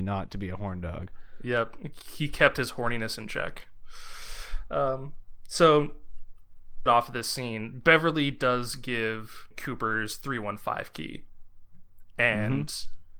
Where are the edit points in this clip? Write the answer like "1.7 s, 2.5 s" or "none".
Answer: 6.9 s, 9.5 s